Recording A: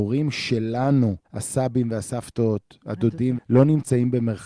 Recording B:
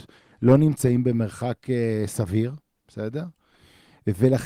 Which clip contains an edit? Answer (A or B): A